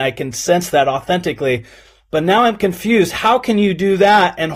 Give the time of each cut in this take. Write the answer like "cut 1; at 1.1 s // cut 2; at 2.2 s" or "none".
none